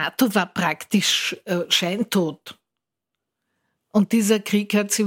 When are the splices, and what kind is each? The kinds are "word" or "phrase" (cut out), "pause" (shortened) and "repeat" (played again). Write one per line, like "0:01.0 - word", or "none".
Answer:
none